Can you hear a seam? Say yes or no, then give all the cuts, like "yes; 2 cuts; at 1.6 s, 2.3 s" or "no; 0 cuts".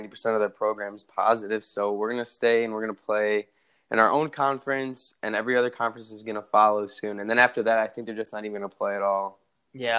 no; 0 cuts